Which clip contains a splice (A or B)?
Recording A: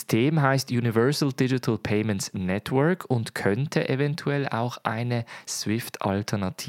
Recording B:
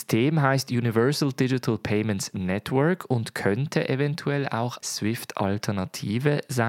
B